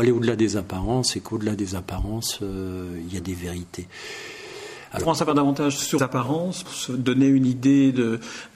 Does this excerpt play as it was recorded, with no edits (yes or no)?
no